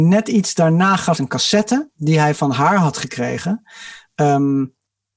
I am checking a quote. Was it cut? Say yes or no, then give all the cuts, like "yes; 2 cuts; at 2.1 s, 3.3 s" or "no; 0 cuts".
yes; 1 cut; at 1.1 s